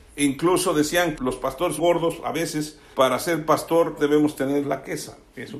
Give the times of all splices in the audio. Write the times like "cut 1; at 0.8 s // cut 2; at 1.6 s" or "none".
cut 1; at 1.2 s // cut 2; at 1.8 s // cut 3; at 2.9 s // cut 4; at 4.0 s // cut 5; at 4.6 s